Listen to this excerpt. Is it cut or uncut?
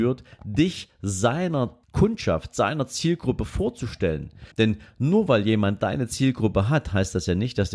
cut